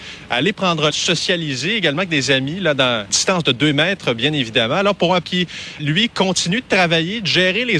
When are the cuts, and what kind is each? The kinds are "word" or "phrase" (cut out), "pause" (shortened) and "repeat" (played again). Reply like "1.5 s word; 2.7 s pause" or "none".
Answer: 0.9 s word; 3.1 s word; 5.2 s word; 5.8 s word